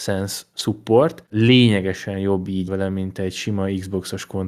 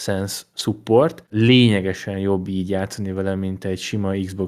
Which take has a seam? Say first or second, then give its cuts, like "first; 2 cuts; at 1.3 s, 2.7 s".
first; 1 cut; at 2.7 s